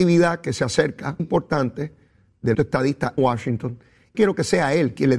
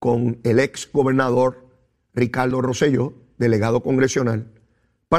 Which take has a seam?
first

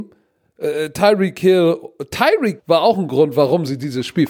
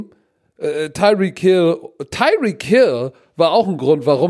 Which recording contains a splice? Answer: first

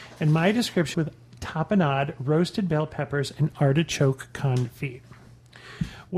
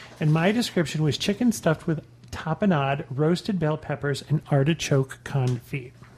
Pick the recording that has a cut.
first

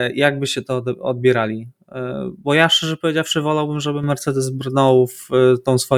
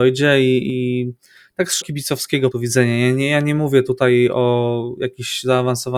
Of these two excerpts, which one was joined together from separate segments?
second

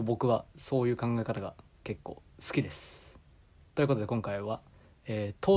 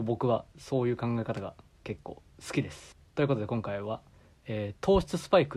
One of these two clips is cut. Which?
second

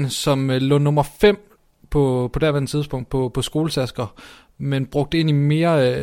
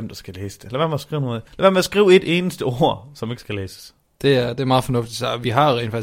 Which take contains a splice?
second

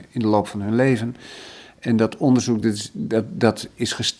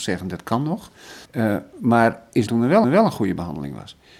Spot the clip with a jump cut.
second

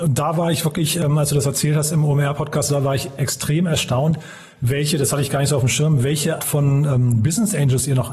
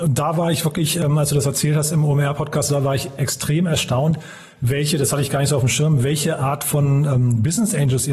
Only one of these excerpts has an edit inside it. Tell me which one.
first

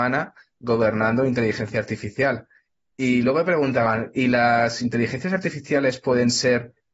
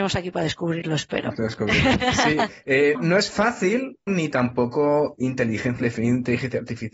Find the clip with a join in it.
second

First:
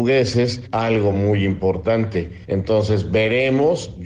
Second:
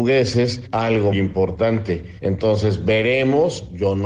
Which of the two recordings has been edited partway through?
second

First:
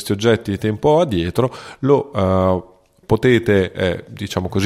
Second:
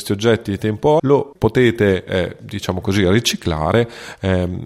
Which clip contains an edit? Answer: second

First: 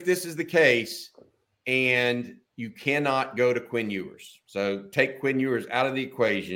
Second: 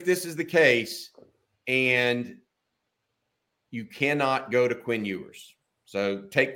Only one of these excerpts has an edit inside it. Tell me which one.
first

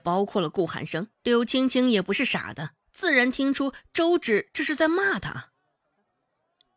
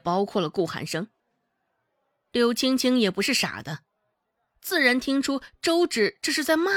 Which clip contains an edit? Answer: first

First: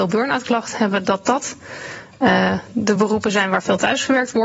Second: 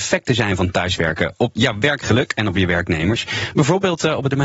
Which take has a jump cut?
second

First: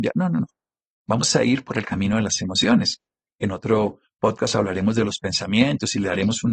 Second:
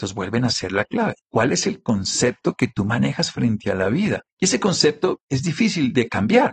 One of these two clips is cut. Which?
second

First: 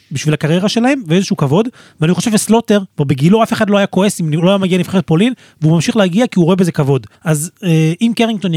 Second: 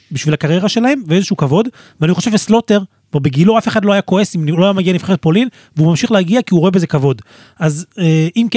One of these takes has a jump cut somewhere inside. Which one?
first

